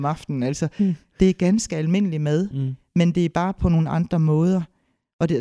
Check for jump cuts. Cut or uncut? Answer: uncut